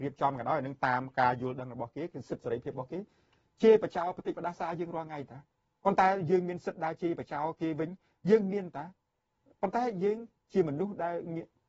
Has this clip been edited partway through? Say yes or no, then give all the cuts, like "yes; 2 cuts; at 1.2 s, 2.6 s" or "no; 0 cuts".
no; 0 cuts